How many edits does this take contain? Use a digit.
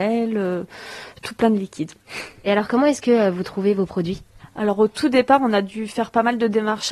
0